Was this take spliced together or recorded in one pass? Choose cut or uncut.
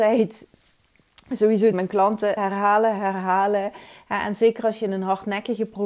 cut